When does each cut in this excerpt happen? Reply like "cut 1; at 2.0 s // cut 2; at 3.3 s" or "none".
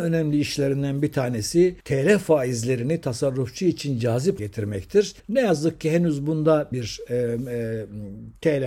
cut 1; at 1.8 s // cut 2; at 4.4 s // cut 3; at 5.2 s // cut 4; at 6.7 s